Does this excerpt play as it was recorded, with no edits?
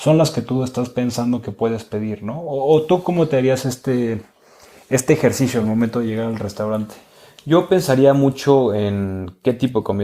yes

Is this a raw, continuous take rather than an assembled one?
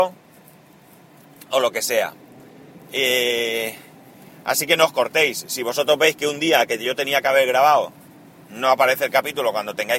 yes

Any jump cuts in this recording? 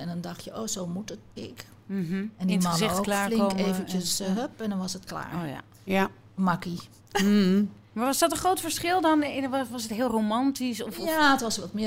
yes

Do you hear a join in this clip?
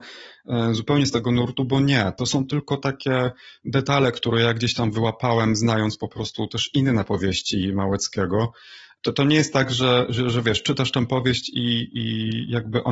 no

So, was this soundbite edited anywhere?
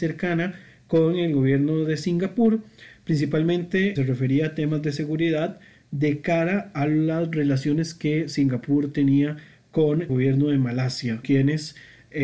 yes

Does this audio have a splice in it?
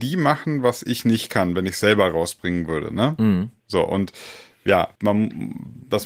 yes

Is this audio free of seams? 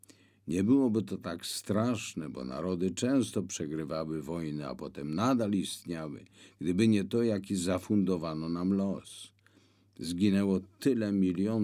yes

